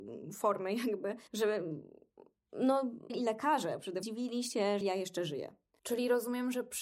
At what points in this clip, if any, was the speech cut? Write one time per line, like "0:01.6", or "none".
0:01.3
0:03.1
0:04.0
0:04.8